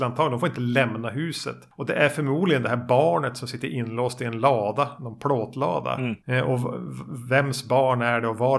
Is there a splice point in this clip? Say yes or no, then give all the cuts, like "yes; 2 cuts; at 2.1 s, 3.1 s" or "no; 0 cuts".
no; 0 cuts